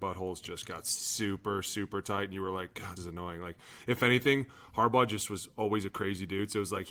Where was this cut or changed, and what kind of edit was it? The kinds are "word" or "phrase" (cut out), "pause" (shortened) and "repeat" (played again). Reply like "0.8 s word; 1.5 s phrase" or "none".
3.0 s word